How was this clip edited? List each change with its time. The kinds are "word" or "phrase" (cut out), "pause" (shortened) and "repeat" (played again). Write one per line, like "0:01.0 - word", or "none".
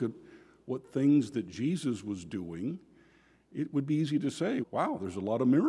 0:04.6 - word